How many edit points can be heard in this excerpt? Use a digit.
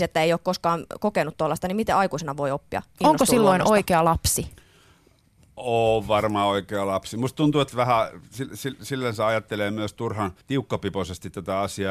2